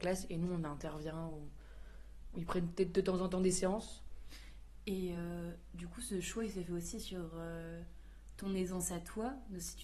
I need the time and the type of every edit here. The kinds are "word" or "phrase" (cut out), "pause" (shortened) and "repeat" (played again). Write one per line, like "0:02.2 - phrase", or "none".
none